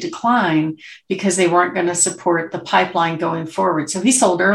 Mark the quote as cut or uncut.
uncut